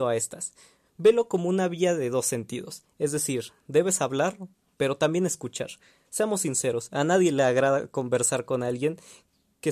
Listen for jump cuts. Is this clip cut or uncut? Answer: uncut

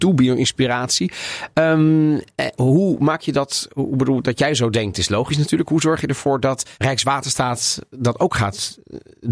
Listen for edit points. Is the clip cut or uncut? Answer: cut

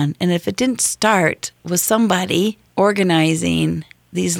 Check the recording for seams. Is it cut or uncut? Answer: cut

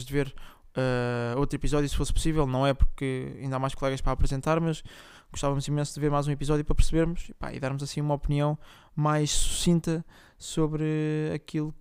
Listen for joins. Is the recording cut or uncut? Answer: uncut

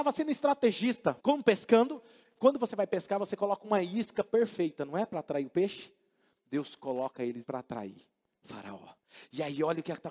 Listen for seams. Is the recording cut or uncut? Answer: cut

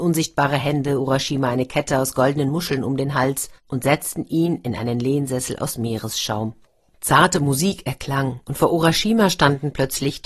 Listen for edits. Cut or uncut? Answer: uncut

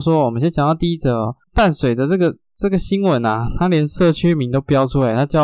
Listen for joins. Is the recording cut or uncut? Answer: cut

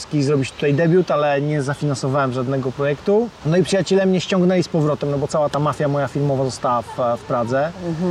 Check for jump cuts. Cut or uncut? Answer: uncut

